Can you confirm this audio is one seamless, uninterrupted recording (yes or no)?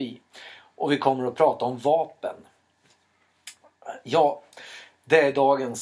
yes